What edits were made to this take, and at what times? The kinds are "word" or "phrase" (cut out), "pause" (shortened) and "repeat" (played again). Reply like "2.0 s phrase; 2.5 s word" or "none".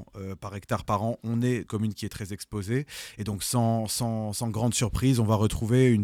1.7 s phrase